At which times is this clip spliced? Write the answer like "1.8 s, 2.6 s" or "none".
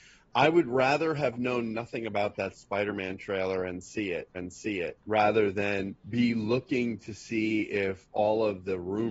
4.3 s, 6.0 s